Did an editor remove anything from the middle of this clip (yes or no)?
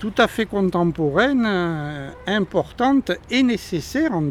no